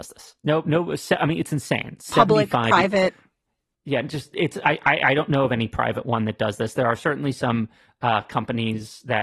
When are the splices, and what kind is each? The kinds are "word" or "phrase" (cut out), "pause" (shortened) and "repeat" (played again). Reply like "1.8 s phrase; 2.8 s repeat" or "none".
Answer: none